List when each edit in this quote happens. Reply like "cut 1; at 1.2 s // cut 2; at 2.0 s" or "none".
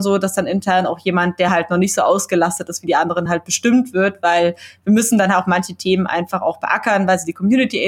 none